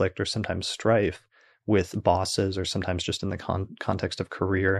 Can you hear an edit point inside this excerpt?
no; 0 cuts

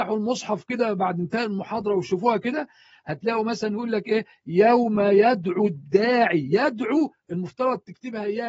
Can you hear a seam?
no; 0 cuts

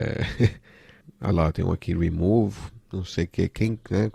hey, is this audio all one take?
no; 1 cut; at 1.0 s

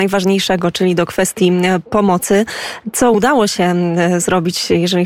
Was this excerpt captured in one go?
yes; 0 cuts

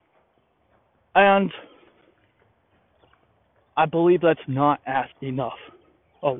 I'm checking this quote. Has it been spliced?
yes; 1 cut; at 5.1 s

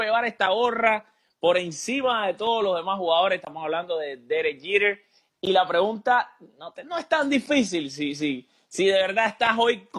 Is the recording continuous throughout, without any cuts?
yes; 0 cuts

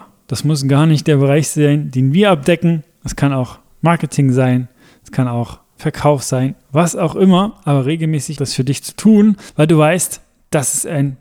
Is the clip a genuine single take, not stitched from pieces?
no; 1 cut; at 8.4 s

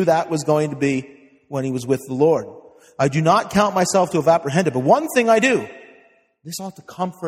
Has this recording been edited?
no; 0 cuts

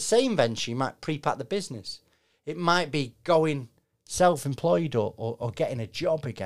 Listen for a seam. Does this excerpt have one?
no; 0 cuts

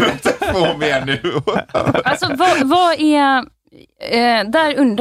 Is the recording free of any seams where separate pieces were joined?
yes; 0 cuts

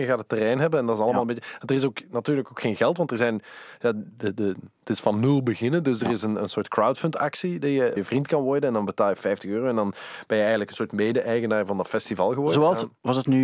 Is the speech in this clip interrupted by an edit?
yes; 1 cut; at 8.0 s

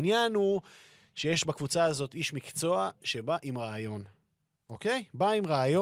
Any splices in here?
no; 0 cuts

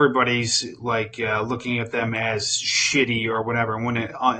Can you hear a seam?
no; 0 cuts

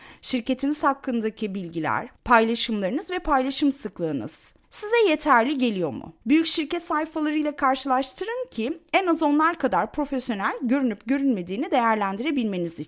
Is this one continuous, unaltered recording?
no; 3 cuts; at 2.2 s, 4.6 s, 6.2 s

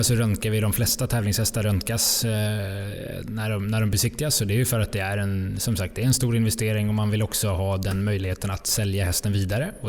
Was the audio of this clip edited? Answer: no; 0 cuts

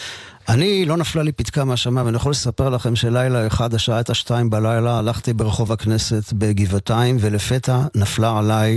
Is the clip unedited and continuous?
yes; 0 cuts

